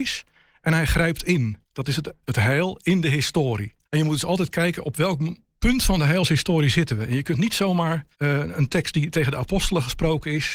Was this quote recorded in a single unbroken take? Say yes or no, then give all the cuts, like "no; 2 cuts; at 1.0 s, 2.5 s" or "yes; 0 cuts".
no; 3 cuts; at 1.6 s, 3.8 s, 8.1 s